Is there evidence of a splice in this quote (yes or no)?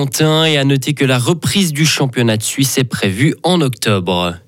no